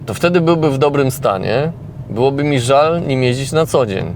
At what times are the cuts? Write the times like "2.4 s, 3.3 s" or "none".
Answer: none

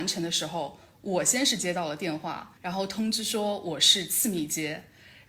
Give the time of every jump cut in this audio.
2.6 s

